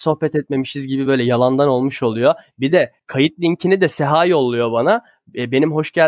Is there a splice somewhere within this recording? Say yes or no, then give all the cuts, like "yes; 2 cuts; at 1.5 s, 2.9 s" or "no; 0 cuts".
no; 0 cuts